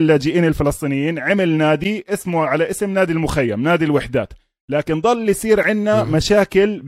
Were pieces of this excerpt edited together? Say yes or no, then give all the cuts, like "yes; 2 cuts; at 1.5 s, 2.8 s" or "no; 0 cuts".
no; 0 cuts